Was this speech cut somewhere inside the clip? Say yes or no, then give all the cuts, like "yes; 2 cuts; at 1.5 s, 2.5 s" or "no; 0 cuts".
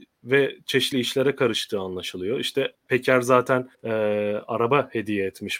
yes; 3 cuts; at 0.9 s, 2.7 s, 3.7 s